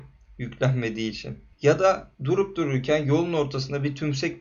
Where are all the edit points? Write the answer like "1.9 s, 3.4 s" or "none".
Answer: 2.1 s